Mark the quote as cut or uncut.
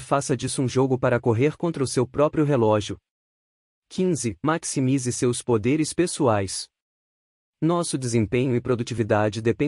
uncut